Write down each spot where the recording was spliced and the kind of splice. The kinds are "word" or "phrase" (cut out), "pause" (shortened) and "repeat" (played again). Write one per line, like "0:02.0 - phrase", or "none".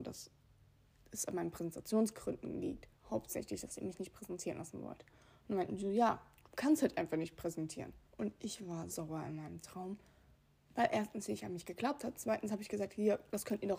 0:03.0 - pause
0:08.1 - pause
0:08.9 - word